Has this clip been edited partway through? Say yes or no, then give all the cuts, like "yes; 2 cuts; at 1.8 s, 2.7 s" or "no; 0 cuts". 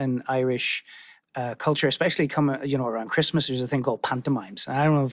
no; 0 cuts